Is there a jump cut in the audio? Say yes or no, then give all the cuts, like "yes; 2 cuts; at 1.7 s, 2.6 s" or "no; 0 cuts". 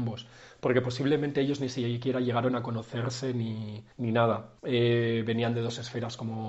yes; 2 cuts; at 3.9 s, 4.6 s